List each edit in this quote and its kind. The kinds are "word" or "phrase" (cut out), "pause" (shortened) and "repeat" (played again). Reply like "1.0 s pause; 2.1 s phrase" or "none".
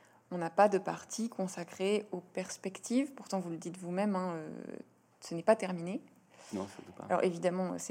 none